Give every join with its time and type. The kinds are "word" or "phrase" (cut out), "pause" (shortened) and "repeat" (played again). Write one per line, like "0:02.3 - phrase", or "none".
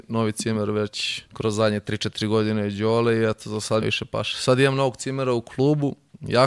0:01.3 - pause
0:03.8 - phrase